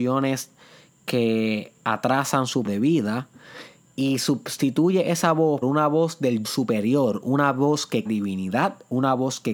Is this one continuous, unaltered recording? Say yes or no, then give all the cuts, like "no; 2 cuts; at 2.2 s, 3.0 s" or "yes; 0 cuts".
no; 4 cuts; at 2.6 s, 5.6 s, 6.4 s, 8.1 s